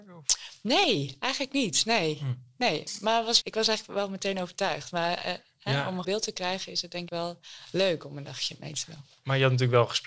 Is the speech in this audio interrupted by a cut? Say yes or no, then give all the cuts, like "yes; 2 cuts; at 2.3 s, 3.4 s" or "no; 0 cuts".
yes; 3 cuts; at 3.4 s, 6.0 s, 7.1 s